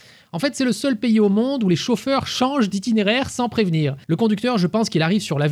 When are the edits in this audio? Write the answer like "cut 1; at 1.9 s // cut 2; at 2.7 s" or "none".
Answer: cut 1; at 4.0 s